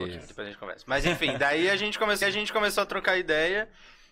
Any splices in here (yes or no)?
yes